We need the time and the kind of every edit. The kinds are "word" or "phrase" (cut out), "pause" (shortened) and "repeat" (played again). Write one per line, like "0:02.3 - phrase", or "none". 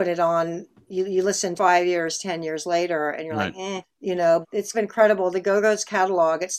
0:01.6 - phrase
0:03.8 - word
0:04.4 - word
0:04.7 - phrase